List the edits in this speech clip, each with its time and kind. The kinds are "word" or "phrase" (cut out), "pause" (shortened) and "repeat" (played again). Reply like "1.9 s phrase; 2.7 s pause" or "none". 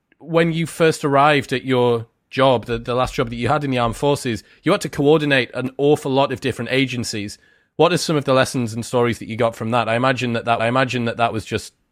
10.6 s repeat